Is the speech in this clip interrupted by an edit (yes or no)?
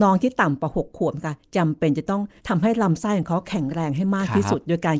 yes